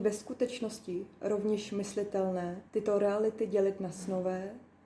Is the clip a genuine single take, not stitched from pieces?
no; 1 cut; at 2.7 s

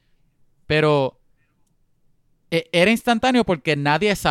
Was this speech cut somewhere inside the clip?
no; 0 cuts

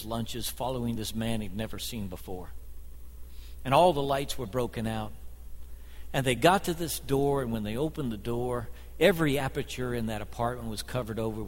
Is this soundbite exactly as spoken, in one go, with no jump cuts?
yes; 0 cuts

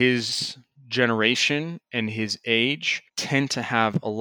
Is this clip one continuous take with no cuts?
no; 1 cut; at 3.1 s

